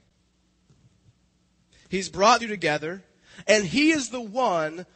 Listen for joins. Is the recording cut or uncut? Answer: cut